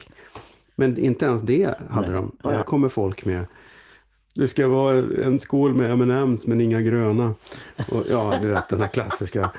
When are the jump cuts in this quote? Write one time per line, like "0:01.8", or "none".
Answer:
0:02.6